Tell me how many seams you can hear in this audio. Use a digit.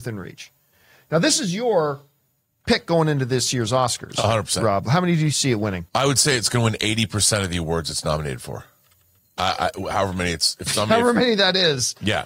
2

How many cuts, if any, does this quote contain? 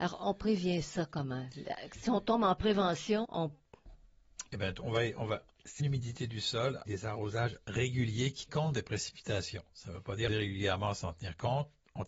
6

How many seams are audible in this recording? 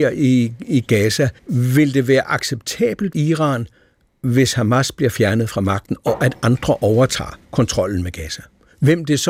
3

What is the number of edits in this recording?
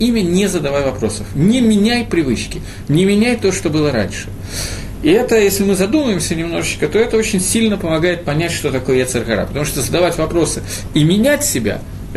0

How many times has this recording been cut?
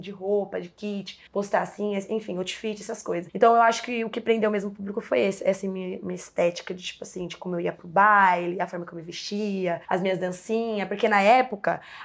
3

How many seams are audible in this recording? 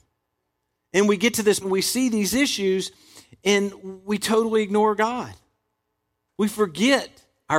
1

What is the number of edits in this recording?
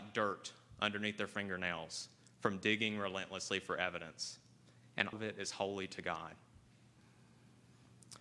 1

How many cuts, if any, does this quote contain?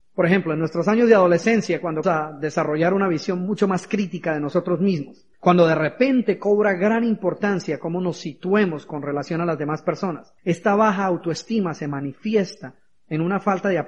3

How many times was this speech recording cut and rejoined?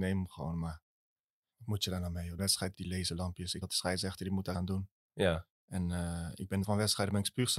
6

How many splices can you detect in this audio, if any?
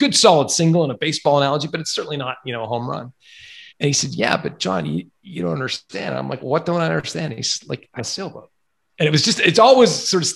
5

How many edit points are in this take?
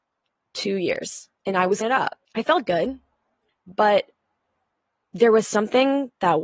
4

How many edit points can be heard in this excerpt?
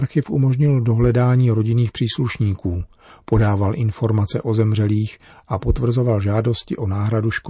0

